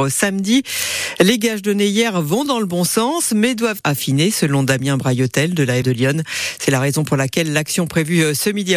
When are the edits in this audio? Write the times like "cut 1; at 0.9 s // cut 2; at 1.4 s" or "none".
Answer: cut 1; at 3.8 s // cut 2; at 5.8 s